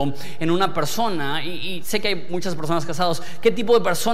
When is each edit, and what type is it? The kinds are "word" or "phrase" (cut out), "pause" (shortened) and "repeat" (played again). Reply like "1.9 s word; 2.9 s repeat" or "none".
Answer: none

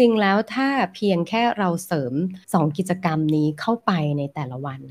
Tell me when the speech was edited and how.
2.4 s pause

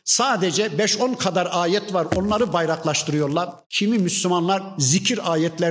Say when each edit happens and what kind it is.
3.6 s pause

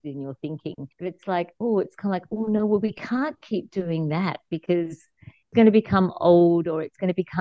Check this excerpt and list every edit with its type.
0.9 s pause

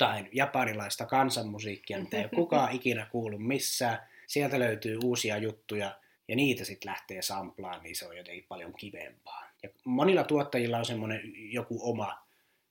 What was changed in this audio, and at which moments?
4.2 s pause; 6.1 s pause; 9.5 s pause

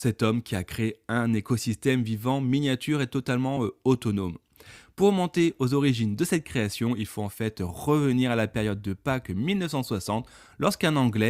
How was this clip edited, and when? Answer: none

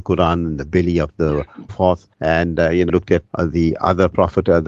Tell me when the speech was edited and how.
1.7 s phrase; 2.1 s pause; 2.9 s word; 3.3 s word

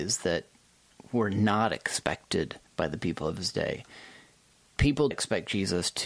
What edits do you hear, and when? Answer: 2.7 s pause; 5.1 s phrase

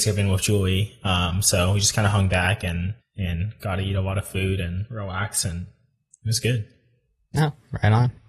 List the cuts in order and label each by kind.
3.0 s pause

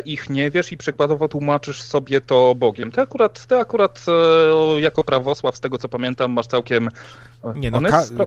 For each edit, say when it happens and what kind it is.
none

